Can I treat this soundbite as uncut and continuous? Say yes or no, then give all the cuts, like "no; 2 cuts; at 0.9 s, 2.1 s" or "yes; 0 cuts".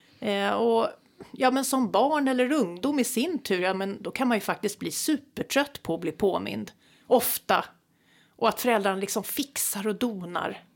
yes; 0 cuts